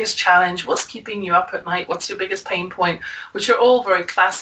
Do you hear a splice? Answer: no; 0 cuts

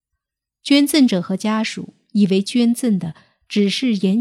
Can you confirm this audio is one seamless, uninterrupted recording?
yes; 0 cuts

